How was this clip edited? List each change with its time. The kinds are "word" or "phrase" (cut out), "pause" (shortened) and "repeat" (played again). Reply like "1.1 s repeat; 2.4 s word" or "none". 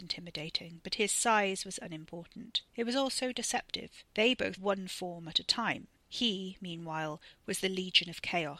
2.7 s pause; 4.1 s pause; 4.6 s word